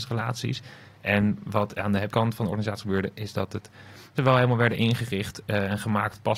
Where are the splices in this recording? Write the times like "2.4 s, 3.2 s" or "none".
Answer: 2.1 s, 4.2 s